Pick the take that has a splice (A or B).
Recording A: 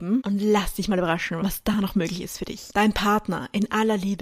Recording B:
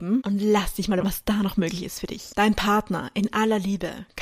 B